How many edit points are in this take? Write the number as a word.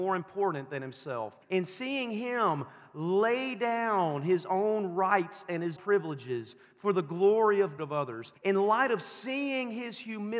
four